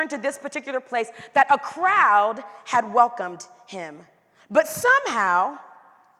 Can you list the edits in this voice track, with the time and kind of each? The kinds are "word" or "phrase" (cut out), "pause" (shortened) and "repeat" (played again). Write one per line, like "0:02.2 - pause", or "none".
none